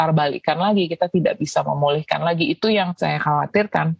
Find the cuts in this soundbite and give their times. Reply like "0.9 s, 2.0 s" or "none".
none

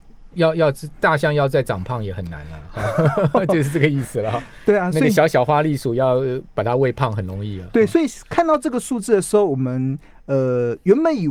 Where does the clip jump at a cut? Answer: none

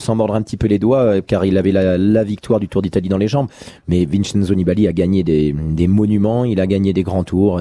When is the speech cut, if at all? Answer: none

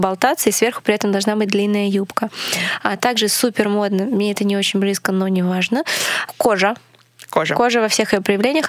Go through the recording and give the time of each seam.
none

